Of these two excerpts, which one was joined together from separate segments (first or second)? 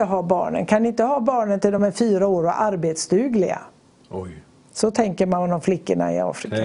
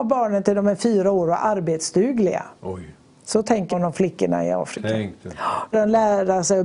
second